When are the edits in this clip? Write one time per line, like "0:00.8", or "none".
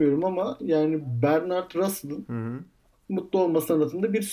none

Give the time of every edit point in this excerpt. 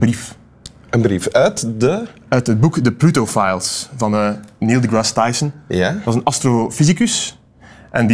none

